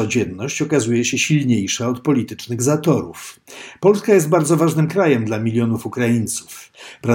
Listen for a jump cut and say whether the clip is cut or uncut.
uncut